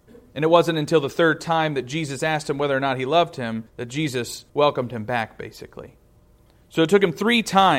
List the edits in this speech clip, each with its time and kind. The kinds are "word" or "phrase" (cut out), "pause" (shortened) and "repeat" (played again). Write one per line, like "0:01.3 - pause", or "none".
0:03.7 - pause
0:04.5 - pause